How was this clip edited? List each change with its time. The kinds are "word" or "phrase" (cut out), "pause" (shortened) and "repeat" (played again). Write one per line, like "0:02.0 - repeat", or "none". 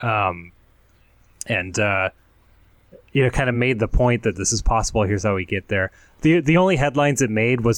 none